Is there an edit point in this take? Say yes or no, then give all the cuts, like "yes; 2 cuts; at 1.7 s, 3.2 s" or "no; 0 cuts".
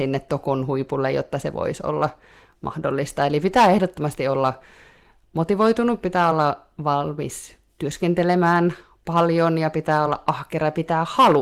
no; 0 cuts